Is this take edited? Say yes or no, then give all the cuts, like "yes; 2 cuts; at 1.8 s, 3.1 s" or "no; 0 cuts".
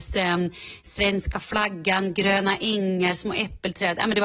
no; 0 cuts